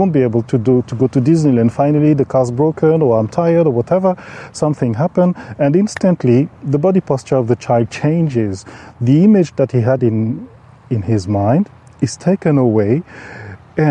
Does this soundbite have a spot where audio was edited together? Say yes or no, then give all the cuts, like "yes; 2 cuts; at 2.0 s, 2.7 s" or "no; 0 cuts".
no; 0 cuts